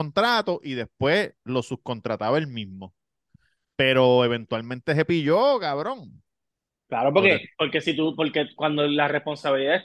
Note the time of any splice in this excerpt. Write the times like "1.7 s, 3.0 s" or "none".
7.5 s

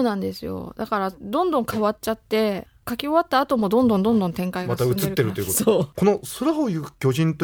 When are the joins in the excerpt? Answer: 5.9 s

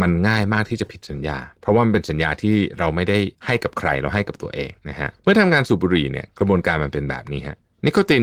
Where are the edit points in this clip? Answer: 1.6 s, 3.3 s, 4.8 s, 5.2 s

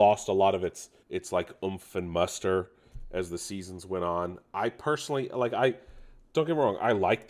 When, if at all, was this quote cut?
1.0 s

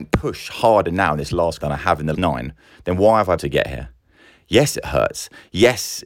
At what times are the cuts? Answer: 1.6 s, 2.1 s, 3.4 s

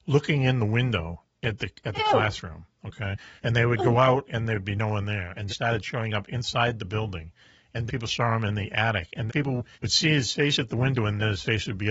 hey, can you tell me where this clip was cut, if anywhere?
1.3 s, 3.4 s, 5.5 s, 7.9 s, 9.3 s, 9.7 s

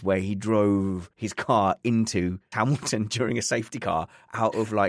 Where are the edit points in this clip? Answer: 1.1 s, 2.5 s

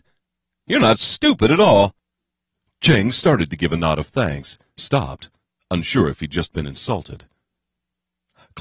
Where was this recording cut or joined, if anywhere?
4.8 s

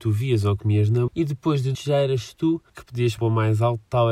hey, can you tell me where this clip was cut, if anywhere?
1.1 s, 1.7 s, 2.7 s, 3.2 s

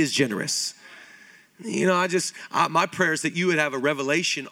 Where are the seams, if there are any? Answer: none

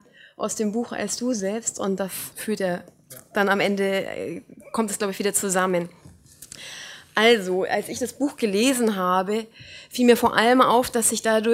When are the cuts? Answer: 2.3 s

